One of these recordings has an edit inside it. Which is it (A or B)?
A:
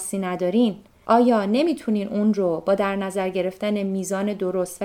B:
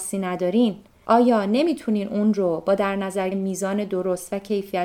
B